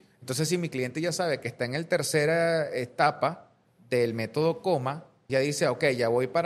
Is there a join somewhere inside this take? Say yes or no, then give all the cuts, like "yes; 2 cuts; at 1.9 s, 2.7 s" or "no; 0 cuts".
yes; 1 cut; at 5.3 s